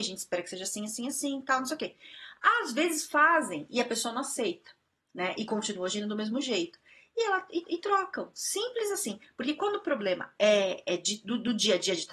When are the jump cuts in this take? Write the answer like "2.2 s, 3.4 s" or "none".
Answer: 7.6 s